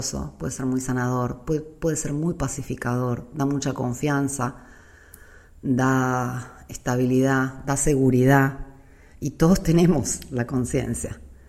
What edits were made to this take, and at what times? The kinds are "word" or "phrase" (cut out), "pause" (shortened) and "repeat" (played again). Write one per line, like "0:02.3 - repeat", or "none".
none